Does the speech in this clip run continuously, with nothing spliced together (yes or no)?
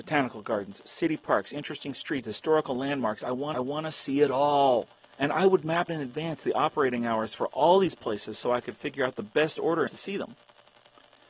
no